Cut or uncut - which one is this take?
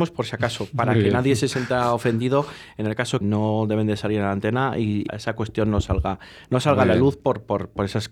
cut